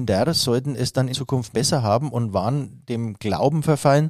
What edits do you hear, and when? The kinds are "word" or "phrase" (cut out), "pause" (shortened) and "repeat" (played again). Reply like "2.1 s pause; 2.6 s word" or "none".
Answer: 1.1 s word; 1.5 s word